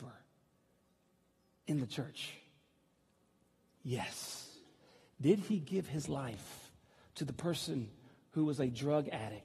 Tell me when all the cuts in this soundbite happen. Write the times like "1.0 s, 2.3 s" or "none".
none